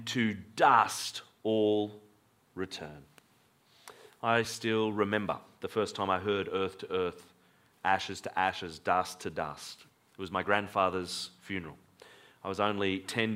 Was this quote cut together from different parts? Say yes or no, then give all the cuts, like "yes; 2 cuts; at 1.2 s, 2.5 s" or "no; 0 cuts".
no; 0 cuts